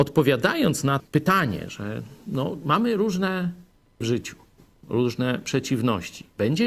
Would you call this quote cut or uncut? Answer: cut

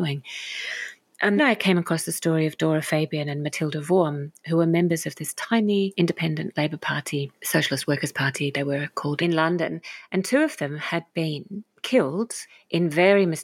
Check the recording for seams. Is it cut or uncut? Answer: cut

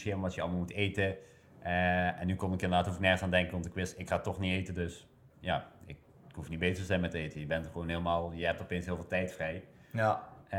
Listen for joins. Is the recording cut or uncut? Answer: uncut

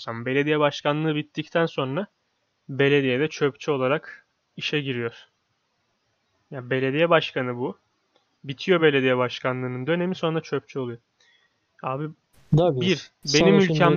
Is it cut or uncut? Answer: uncut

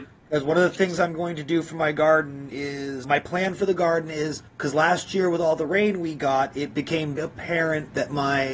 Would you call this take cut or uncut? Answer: cut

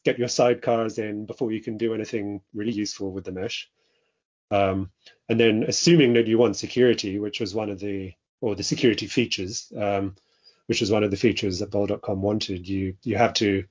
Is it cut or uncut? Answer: uncut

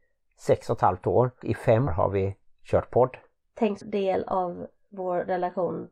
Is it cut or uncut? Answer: cut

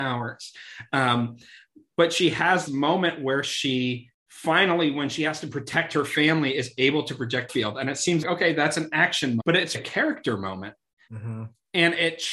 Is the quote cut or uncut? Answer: cut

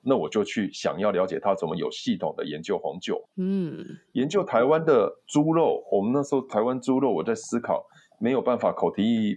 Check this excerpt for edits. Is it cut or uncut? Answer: uncut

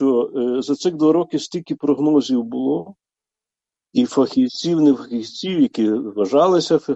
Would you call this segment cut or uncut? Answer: uncut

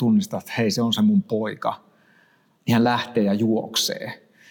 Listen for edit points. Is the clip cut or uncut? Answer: uncut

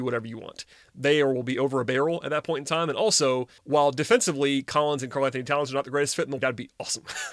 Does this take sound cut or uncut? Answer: cut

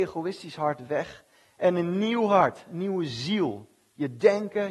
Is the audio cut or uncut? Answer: uncut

